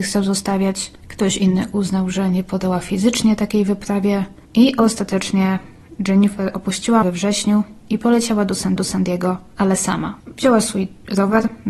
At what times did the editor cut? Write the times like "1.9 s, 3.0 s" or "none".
1.0 s, 7.0 s, 8.8 s, 10.2 s